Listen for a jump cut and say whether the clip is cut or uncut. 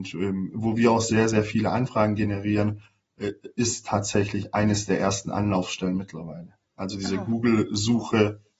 uncut